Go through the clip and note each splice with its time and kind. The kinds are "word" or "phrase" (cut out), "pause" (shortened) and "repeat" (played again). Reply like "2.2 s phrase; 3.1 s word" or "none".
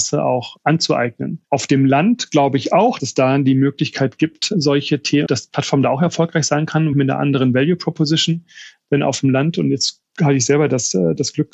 1.4 s pause; 3.0 s word; 5.3 s word; 6.9 s word; 10.1 s pause